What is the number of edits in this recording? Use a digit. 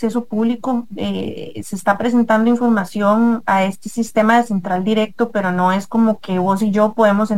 0